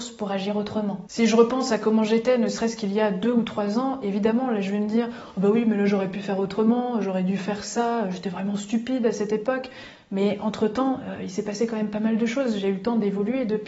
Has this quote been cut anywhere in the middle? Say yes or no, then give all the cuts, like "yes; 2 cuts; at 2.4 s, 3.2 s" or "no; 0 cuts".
no; 0 cuts